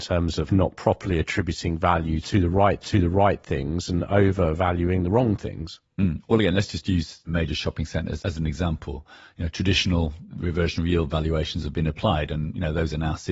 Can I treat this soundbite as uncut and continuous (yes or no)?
no